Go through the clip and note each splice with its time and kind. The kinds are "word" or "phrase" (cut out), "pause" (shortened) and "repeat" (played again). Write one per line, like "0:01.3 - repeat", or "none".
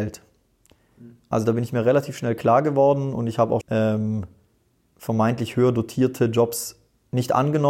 0:03.6 - word

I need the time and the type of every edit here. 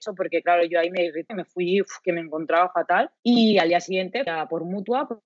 0:01.3 - word
0:03.2 - pause
0:04.3 - word

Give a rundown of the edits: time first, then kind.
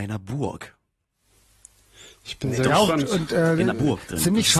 0:03.7 - word

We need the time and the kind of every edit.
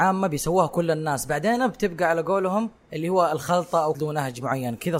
0:02.8 - pause
0:03.9 - phrase

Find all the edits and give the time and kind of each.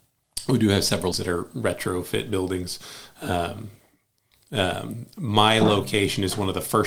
0:01.1 - word

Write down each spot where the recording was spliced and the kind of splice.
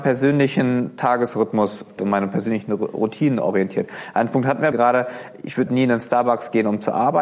0:02.0 - word
0:04.7 - word
0:05.7 - word

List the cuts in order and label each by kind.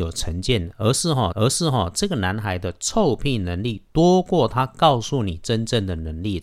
0:01.3 - repeat

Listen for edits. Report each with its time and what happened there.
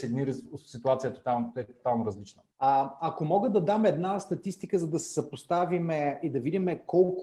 0:02.5 - pause

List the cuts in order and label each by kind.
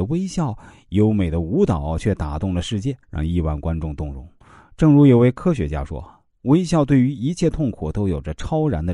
0:03.0 - pause
0:04.4 - pause

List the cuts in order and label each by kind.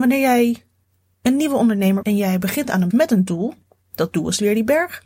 0:02.0 - word
0:02.9 - word

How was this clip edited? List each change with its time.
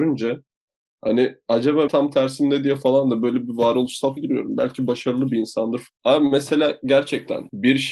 0:01.9 - word
0:04.2 - word

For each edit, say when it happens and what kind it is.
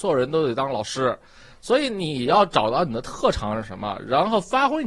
none

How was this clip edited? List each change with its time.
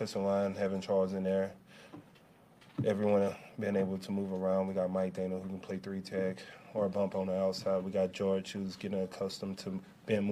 none

